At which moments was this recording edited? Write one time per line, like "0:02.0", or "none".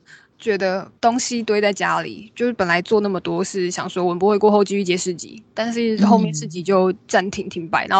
0:01.0